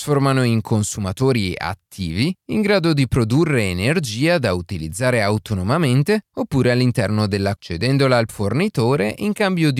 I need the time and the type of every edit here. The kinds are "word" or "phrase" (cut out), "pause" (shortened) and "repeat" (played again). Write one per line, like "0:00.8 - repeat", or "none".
0:07.6 - word
0:08.3 - word